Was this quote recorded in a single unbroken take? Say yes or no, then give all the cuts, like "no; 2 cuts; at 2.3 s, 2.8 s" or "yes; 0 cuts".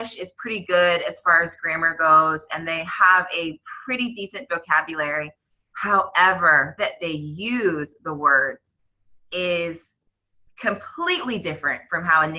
no; 1 cut; at 6.8 s